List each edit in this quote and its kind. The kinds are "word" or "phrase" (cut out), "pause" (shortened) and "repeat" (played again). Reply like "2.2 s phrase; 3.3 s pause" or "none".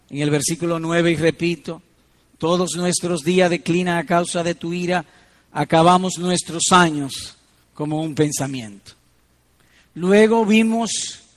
none